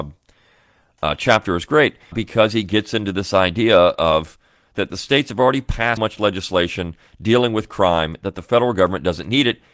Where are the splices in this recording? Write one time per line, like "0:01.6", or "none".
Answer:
0:02.1
0:04.7
0:06.0